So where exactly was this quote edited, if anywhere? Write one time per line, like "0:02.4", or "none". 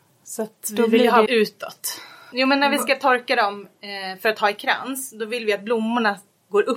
0:01.3